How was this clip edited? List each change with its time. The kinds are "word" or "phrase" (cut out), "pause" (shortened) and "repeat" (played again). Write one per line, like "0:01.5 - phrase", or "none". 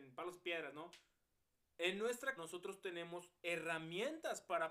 0:02.4 - word